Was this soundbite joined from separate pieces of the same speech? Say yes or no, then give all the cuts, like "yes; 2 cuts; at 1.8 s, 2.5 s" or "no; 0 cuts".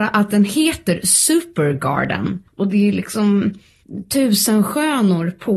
yes; 1 cut; at 2.5 s